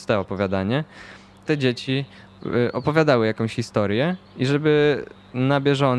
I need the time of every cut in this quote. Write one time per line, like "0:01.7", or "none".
0:01.4
0:04.2